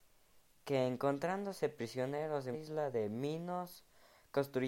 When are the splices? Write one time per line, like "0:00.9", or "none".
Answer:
0:02.5